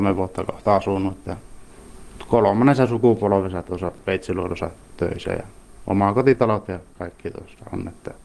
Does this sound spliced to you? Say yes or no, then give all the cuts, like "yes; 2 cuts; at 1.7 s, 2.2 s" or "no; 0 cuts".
no; 0 cuts